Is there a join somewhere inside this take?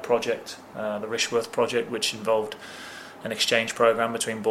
no; 0 cuts

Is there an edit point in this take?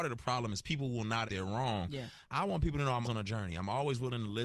yes; 3 cuts; at 1.3 s, 2.2 s, 3.0 s

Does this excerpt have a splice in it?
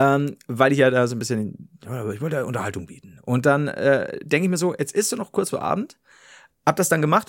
yes; 1 cut; at 5.5 s

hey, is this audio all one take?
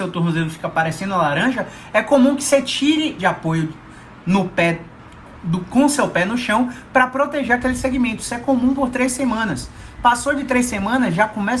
no; 1 cut; at 3.2 s

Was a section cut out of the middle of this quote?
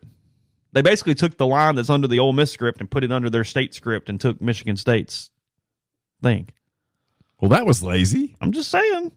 no; 0 cuts

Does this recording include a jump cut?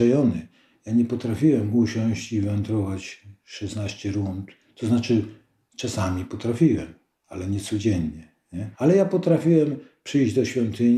yes; 1 cut; at 8.7 s

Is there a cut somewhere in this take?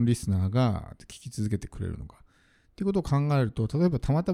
no; 0 cuts

